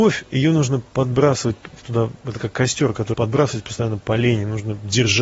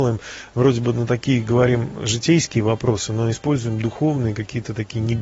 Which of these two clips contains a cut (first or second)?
first